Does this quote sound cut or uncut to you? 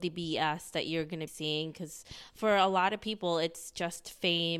cut